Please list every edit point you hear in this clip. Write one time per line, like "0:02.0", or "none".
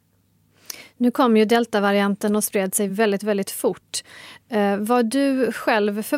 none

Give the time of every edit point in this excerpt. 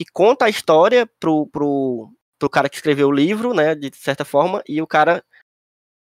none

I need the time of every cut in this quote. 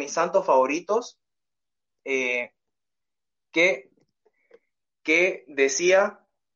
0:03.0

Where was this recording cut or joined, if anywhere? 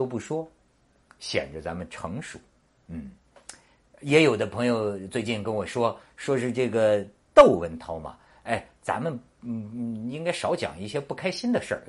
none

